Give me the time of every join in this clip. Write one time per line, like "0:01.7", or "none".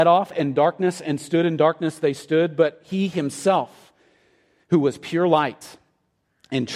none